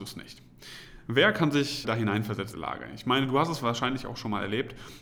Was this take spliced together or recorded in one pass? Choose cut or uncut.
cut